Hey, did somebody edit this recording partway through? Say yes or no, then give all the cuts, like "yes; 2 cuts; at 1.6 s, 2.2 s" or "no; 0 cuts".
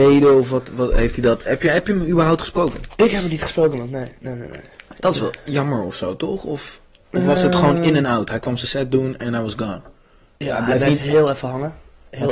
no; 0 cuts